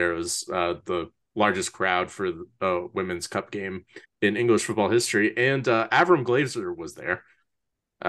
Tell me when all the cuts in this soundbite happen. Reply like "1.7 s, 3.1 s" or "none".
4.0 s